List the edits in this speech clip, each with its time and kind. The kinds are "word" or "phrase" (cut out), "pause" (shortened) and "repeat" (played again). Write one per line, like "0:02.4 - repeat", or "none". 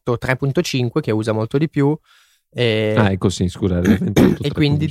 none